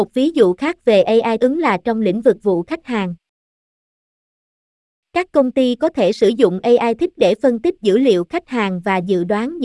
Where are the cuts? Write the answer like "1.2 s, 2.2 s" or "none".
1.4 s, 2.4 s, 7.2 s